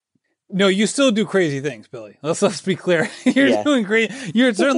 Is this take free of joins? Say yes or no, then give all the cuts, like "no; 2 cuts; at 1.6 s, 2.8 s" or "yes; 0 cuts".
yes; 0 cuts